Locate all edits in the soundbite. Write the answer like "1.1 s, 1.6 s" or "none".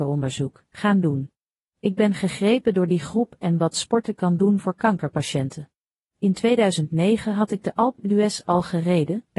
none